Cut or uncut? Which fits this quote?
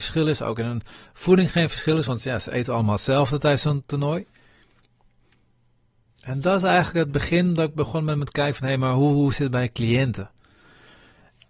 uncut